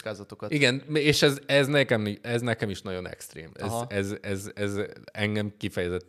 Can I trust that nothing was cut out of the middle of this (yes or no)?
yes